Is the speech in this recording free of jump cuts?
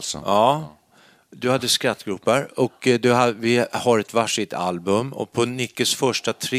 yes; 0 cuts

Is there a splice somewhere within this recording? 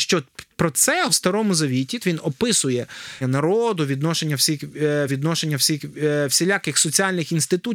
yes; 4 cuts; at 1.1 s, 2.0 s, 3.2 s, 5.1 s

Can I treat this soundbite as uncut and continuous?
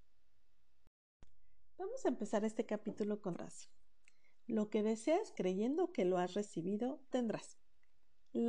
no; 3 cuts; at 3.3 s, 5.3 s, 7.1 s

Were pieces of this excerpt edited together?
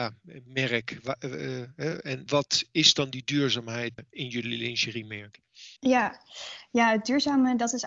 yes; 3 cuts; at 2.3 s, 4.0 s, 5.8 s

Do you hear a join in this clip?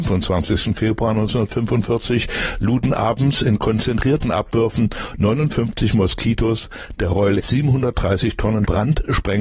yes; 1 cut; at 7.4 s

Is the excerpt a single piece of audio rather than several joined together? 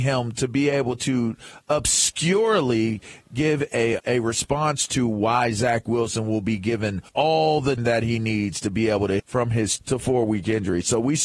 no; 6 cuts; at 3.7 s, 4.0 s, 7.1 s, 7.8 s, 9.2 s, 9.8 s

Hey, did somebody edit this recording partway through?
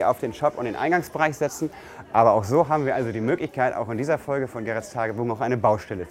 no; 0 cuts

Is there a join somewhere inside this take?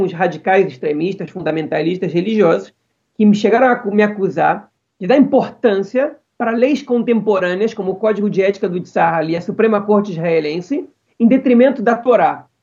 no; 0 cuts

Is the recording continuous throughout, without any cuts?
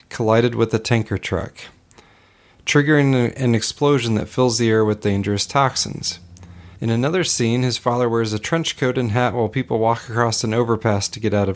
no; 1 cut; at 6.8 s

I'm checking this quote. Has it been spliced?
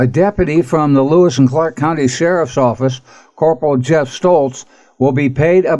no; 0 cuts

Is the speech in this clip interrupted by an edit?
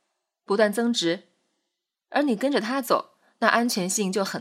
no; 0 cuts

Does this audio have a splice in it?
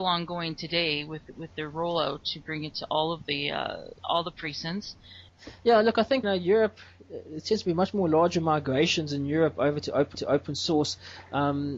yes; 3 cuts; at 4.0 s, 6.2 s, 10.1 s

